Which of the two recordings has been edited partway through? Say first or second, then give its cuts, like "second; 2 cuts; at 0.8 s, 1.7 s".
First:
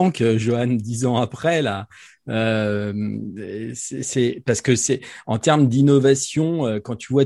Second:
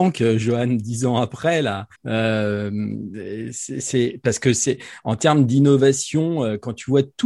second; 1 cut; at 1.9 s